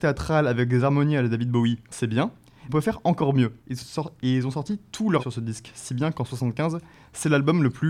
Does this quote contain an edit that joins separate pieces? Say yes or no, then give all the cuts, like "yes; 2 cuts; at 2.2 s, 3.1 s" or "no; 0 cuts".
yes; 4 cuts; at 1.8 s, 2.7 s, 3.6 s, 5.2 s